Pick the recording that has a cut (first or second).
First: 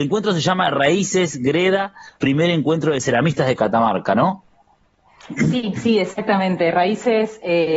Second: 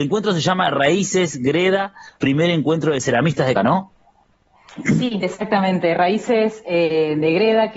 second